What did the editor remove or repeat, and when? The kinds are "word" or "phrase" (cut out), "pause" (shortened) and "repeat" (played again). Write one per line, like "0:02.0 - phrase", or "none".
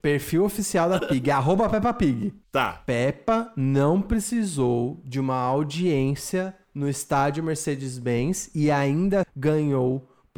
0:01.0 - word
0:09.2 - word